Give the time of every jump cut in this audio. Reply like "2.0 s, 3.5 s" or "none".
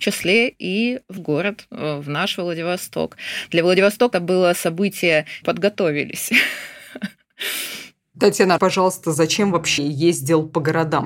1.2 s, 4.1 s, 5.4 s, 8.6 s, 9.8 s